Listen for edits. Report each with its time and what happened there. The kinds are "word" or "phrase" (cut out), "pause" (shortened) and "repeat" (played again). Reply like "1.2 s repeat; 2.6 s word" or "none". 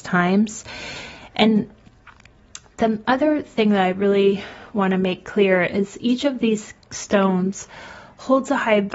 4.7 s pause